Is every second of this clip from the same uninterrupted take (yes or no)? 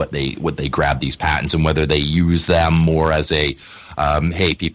yes